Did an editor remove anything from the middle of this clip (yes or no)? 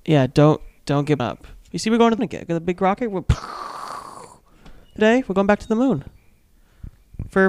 yes